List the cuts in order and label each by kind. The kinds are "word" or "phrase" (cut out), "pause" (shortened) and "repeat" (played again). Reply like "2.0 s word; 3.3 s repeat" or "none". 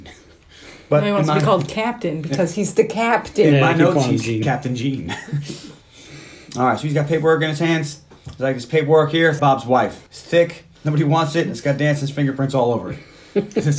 9.4 s word; 10.1 s pause; 10.7 s pause